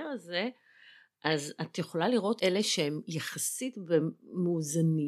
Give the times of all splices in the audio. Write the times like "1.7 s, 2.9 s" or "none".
2.4 s